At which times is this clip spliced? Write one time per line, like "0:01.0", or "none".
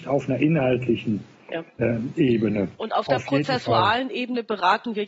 none